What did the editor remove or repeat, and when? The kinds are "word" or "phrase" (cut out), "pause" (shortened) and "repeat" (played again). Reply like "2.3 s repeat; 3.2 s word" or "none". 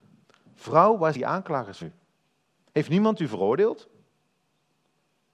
1.1 s word; 1.8 s word